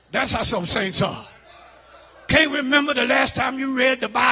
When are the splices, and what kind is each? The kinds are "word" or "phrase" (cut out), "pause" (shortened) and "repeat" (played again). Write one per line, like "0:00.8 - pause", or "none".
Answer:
none